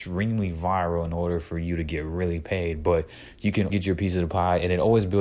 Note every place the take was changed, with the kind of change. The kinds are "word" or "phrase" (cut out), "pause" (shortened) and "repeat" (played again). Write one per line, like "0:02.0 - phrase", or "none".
0:03.7 - word